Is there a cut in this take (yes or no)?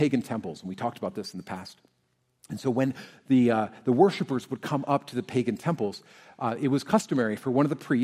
no